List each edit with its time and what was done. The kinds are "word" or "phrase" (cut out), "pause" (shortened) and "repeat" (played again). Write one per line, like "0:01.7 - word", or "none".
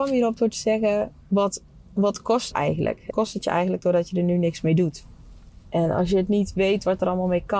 0:01.2 - pause
0:02.5 - phrase
0:03.1 - word